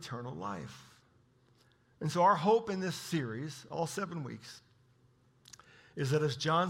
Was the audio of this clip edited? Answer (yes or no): no